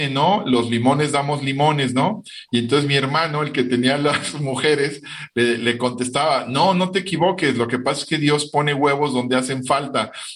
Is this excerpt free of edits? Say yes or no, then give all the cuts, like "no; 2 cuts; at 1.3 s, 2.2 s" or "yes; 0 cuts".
yes; 0 cuts